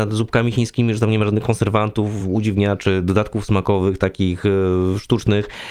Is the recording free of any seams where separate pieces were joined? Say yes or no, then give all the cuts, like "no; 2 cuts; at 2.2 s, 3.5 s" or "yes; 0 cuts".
yes; 0 cuts